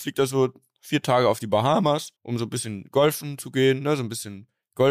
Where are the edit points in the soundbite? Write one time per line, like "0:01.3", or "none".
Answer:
0:02.2